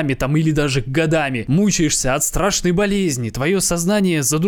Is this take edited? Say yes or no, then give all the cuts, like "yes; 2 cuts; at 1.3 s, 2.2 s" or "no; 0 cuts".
no; 0 cuts